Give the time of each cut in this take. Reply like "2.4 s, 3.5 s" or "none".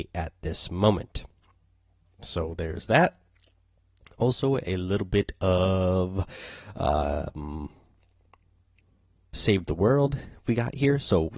none